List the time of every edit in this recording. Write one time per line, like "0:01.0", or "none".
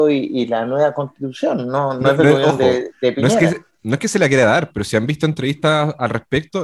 none